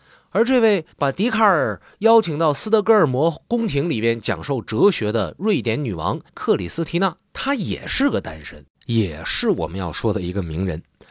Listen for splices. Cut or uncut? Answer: cut